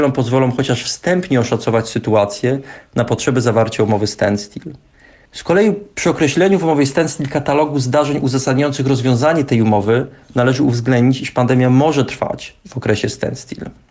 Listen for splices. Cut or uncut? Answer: uncut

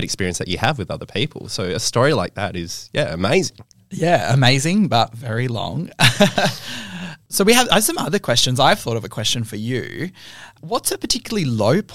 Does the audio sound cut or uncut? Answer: uncut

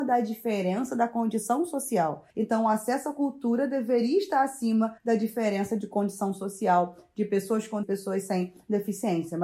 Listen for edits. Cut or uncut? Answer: cut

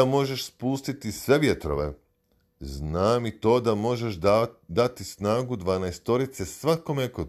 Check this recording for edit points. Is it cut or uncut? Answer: uncut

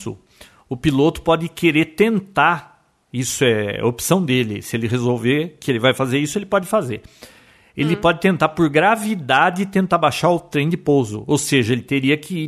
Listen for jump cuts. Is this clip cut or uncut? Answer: uncut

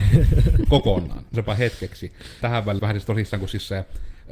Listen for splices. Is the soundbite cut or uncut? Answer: cut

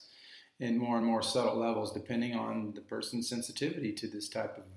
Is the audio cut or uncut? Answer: uncut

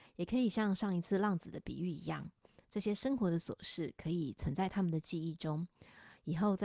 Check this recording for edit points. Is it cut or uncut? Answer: uncut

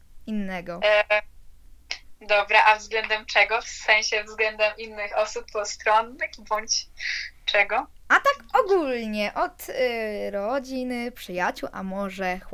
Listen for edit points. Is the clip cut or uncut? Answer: uncut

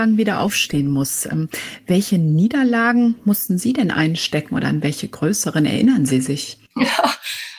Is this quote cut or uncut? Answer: cut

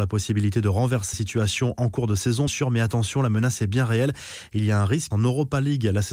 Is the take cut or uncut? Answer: cut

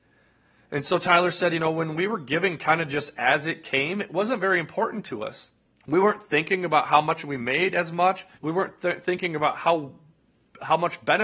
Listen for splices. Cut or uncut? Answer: cut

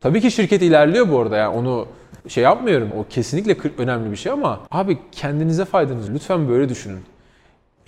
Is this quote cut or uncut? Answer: cut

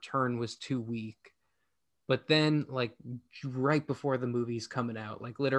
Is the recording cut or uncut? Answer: uncut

